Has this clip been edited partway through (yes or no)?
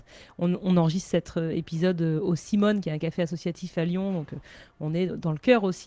no